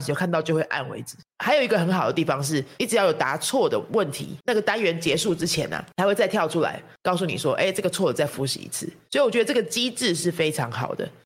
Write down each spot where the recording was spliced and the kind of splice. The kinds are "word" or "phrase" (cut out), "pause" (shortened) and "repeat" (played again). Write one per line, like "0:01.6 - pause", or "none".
0:04.4 - pause

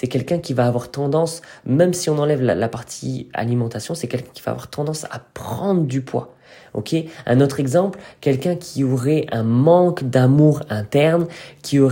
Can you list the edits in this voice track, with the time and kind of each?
none

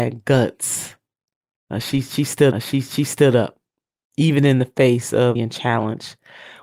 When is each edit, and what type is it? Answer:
0:02.5 - repeat
0:05.4 - word

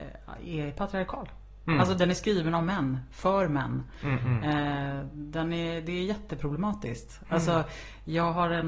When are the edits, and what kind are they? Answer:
none

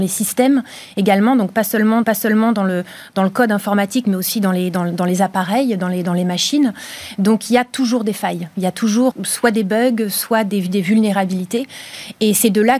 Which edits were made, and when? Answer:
0:02.0 - repeat
0:09.1 - word

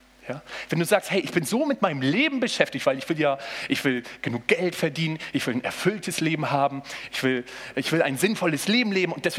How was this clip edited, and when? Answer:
none

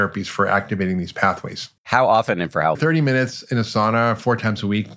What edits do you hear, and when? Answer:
0:01.8 - pause
0:02.7 - phrase

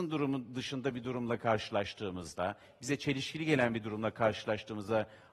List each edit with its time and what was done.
none

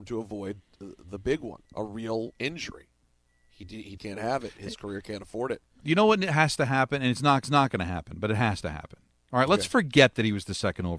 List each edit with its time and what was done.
0:01.7 - pause
0:04.0 - word
0:07.4 - repeat

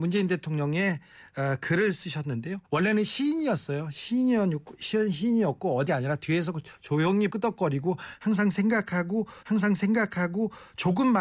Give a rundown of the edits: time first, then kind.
0:02.6 - pause
0:05.9 - word
0:07.3 - word
0:09.4 - repeat

